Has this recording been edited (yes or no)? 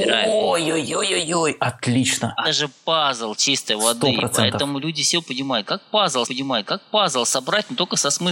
yes